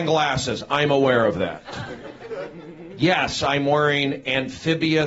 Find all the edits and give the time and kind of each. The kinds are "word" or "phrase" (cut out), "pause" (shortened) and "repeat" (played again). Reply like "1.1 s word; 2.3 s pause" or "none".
none